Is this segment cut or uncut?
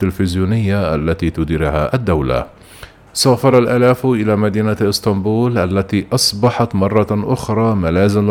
uncut